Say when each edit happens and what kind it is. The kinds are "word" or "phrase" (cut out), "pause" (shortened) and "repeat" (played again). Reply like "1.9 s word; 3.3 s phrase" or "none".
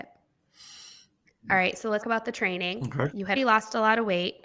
2.0 s word; 3.4 s word